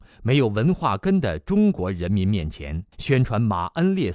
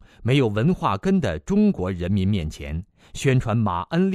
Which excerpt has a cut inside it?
first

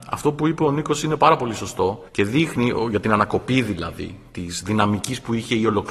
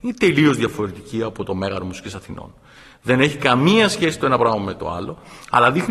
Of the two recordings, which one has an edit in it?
first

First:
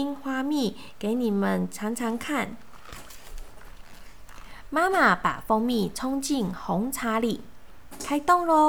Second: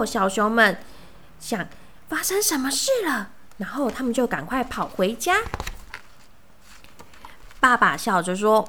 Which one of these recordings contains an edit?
second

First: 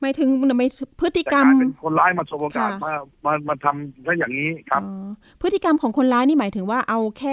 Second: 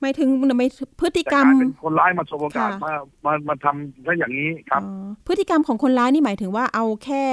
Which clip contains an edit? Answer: second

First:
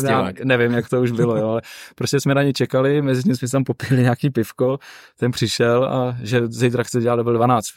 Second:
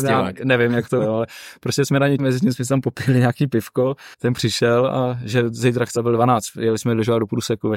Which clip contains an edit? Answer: second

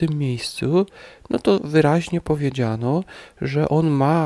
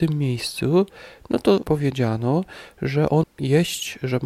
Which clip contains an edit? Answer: second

